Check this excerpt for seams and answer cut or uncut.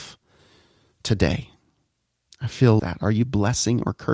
cut